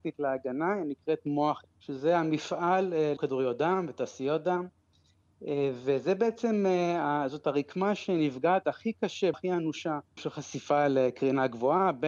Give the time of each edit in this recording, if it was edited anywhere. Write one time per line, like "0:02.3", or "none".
0:01.6
0:03.2
0:09.3
0:10.2

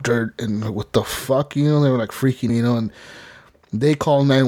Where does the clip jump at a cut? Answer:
0:02.5

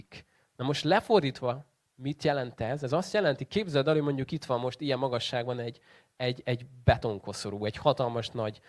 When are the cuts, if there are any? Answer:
none

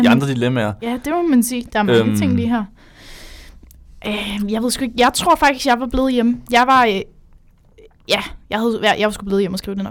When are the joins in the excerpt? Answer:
none

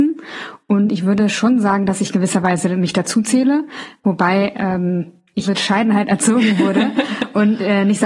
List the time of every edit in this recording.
0:05.4

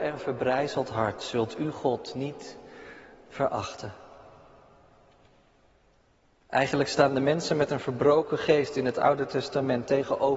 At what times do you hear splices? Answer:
none

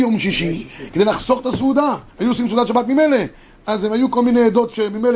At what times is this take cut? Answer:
0:02.1

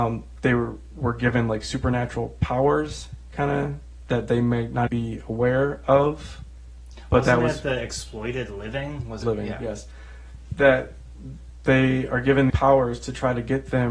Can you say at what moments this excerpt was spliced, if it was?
0:04.9
0:09.2
0:12.5

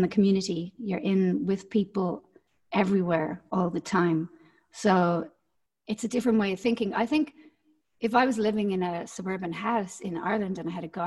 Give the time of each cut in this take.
none

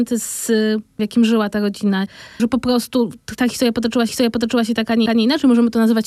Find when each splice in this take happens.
0:01.0
0:02.4
0:04.1
0:05.1

